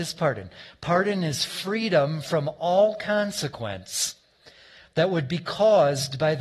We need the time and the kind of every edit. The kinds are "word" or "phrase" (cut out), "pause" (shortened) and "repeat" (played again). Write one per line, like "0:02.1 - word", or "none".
none

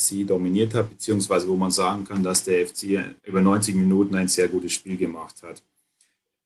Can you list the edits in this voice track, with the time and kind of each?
0:03.2 - pause

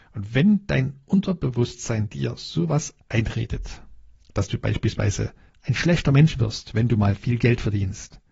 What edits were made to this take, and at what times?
0:04.2 - pause
0:05.5 - pause

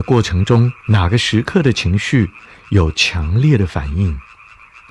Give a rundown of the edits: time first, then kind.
none

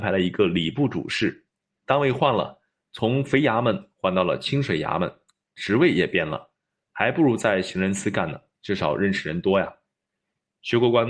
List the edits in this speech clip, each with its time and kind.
none

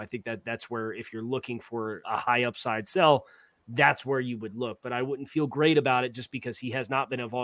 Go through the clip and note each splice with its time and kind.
0:02.0 - word

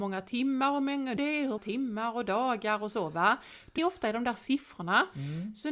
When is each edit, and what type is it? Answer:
0:01.2 - word
0:01.6 - word
0:03.8 - word

